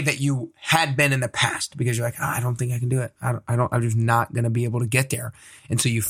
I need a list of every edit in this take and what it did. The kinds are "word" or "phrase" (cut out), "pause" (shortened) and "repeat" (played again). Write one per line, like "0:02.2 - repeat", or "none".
none